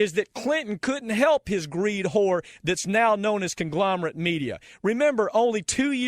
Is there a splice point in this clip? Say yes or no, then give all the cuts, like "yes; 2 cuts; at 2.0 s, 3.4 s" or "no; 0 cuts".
no; 0 cuts